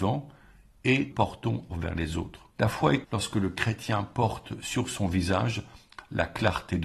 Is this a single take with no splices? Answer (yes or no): no